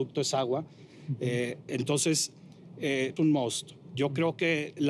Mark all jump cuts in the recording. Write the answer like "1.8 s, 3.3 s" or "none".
3.2 s